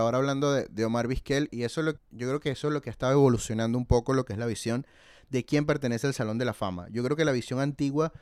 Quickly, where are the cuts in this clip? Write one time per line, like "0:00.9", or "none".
0:01.5
0:02.0